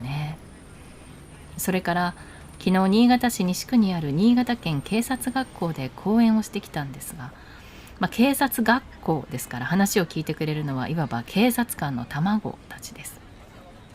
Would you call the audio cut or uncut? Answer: uncut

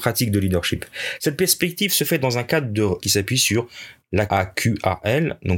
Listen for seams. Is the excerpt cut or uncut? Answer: cut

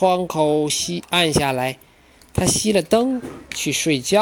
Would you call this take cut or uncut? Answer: uncut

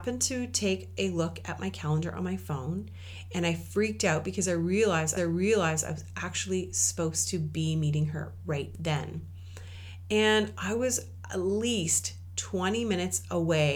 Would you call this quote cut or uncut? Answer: cut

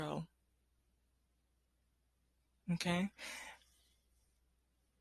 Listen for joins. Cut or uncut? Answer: uncut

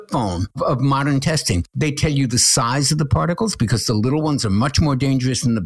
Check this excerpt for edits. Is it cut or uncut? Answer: uncut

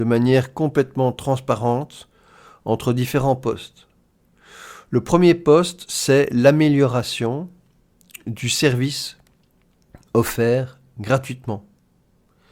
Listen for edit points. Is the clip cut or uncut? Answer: uncut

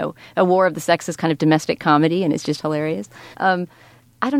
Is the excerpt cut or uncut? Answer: cut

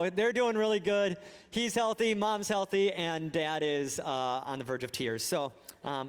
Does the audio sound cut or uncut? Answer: uncut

